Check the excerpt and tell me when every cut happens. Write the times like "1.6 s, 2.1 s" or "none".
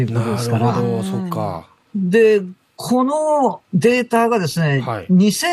3.6 s